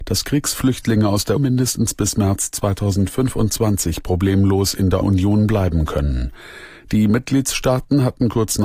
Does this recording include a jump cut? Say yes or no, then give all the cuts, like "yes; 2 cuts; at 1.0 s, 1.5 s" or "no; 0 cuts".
yes; 2 cuts; at 1.4 s, 5.0 s